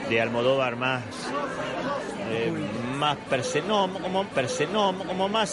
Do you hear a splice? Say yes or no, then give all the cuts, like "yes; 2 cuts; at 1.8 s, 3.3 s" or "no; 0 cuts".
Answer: yes; 1 cut; at 4.2 s